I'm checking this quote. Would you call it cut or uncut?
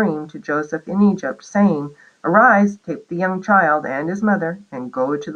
uncut